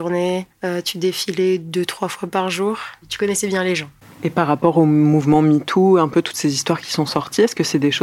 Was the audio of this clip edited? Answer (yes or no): no